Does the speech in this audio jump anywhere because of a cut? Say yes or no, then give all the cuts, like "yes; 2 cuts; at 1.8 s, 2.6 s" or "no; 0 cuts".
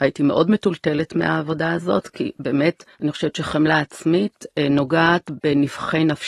yes; 1 cut; at 2.9 s